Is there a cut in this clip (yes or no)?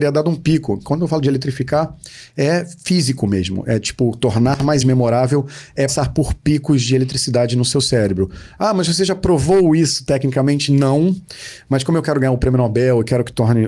yes